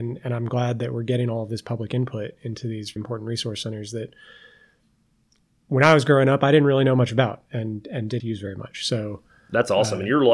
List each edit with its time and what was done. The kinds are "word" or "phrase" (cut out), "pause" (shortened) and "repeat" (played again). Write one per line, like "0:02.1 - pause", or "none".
0:03.0 - word
0:08.2 - word